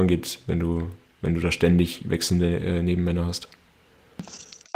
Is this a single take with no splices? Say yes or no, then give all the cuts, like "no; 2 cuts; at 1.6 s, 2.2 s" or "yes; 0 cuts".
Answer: yes; 0 cuts